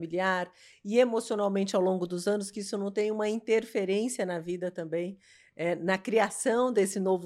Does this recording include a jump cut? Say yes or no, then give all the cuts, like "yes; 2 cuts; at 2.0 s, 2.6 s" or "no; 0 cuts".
no; 0 cuts